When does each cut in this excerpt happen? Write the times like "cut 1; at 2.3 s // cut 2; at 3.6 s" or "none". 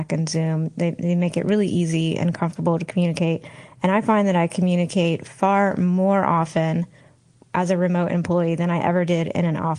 none